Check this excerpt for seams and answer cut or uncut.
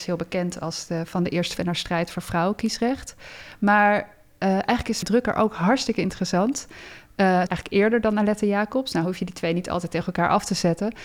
cut